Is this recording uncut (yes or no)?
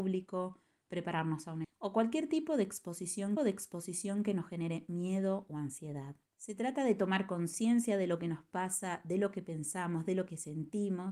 no